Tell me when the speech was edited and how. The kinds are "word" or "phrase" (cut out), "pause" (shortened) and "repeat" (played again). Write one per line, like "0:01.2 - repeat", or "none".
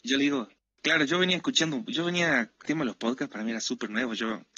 0:02.6 - word